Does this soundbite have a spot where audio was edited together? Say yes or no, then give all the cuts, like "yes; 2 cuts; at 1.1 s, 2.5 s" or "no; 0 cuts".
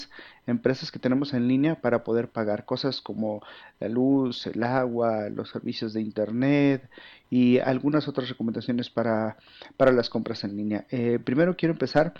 no; 0 cuts